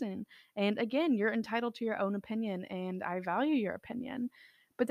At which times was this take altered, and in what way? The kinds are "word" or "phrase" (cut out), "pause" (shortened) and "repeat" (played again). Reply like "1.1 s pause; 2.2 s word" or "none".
none